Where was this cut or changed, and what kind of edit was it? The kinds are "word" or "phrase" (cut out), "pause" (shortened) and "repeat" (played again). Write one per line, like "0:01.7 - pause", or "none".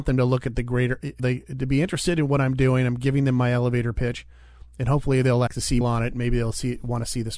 0:01.2 - word
0:05.5 - word
0:05.8 - phrase